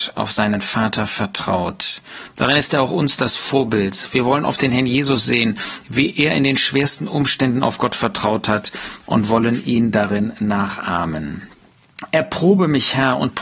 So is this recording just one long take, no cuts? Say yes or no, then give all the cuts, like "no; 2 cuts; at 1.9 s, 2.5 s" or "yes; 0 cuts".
yes; 0 cuts